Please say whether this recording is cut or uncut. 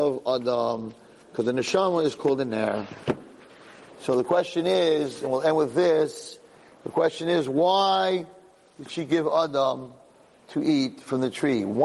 uncut